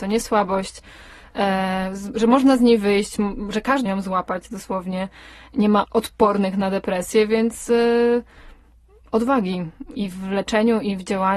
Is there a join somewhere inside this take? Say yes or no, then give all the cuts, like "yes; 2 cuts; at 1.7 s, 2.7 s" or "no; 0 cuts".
yes; 3 cuts; at 3.9 s, 5.8 s, 10.0 s